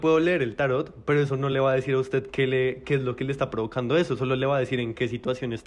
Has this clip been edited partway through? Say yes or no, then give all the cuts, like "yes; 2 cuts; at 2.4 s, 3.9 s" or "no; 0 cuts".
no; 0 cuts